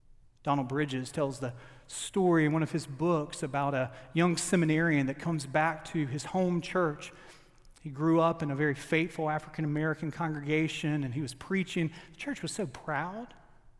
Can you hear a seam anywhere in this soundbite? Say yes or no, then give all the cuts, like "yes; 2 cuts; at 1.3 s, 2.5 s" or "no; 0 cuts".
no; 0 cuts